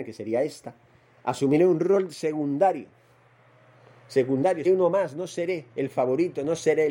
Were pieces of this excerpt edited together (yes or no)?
yes